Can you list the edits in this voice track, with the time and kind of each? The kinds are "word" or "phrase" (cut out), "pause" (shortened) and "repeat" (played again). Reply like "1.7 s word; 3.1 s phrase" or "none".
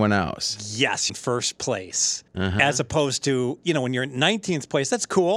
1.1 s word; 2.3 s pause